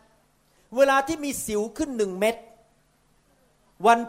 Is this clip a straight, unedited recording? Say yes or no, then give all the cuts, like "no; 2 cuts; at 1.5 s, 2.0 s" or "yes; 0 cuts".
yes; 0 cuts